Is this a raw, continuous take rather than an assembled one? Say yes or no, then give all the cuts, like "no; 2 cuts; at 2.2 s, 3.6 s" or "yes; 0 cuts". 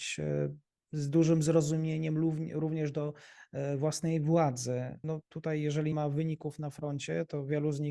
no; 2 cuts; at 5.0 s, 5.9 s